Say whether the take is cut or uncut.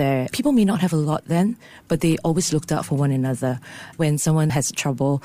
uncut